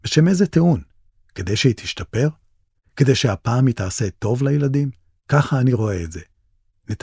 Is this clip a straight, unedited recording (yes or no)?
no